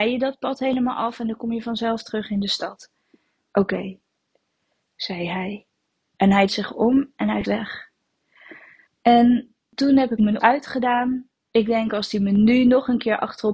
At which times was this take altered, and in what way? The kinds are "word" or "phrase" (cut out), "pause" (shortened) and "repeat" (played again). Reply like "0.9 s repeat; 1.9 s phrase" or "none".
6.5 s word; 7.4 s word; 8.9 s pause; 10.4 s word; 11.4 s pause